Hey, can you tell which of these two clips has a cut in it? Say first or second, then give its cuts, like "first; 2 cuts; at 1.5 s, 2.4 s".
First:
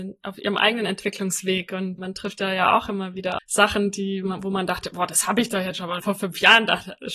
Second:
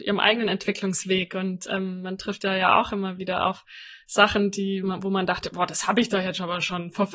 first; 3 cuts; at 2.0 s, 3.4 s, 6.0 s